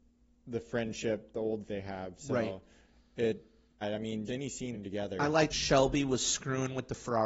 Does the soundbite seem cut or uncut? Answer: cut